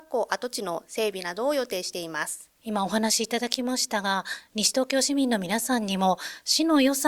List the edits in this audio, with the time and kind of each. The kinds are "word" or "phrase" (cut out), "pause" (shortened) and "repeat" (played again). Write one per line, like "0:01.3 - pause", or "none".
0:02.6 - pause